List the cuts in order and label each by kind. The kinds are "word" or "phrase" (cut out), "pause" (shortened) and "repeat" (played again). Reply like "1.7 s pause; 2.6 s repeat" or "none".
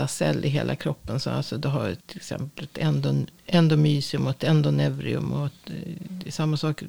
2.0 s pause